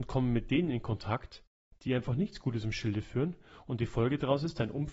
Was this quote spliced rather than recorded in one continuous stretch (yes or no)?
no